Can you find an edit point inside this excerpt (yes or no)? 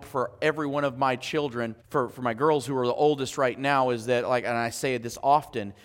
yes